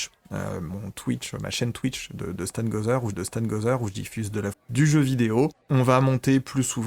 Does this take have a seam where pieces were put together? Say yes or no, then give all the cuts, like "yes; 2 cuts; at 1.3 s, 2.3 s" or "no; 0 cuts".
yes; 3 cuts; at 3.1 s, 4.5 s, 5.6 s